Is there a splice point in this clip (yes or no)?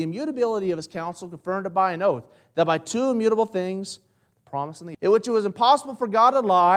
yes